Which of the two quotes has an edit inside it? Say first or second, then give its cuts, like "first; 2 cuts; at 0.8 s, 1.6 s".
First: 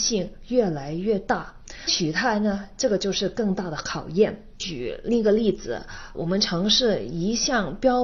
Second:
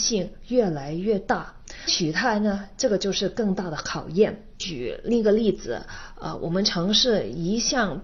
first; 1 cut; at 6.1 s